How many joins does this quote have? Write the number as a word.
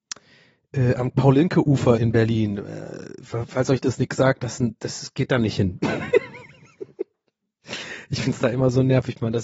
one